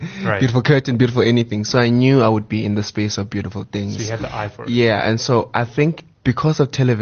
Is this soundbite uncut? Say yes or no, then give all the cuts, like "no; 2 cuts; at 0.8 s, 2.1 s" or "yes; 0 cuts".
yes; 0 cuts